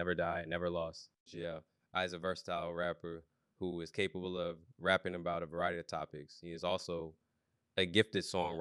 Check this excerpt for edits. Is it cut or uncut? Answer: uncut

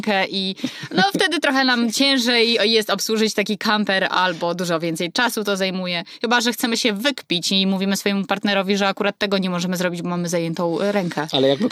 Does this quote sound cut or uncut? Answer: uncut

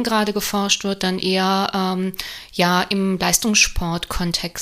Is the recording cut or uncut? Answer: uncut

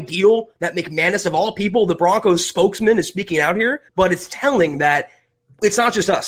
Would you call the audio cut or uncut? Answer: cut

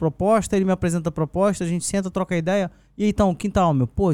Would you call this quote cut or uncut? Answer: uncut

